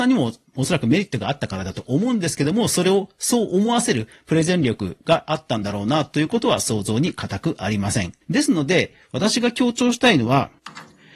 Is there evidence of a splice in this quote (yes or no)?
yes